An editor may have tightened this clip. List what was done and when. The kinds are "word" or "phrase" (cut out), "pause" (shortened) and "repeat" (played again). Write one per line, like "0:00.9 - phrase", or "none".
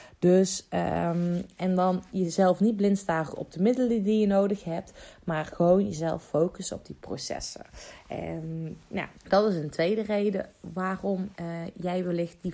0:09.2 - pause
0:11.3 - pause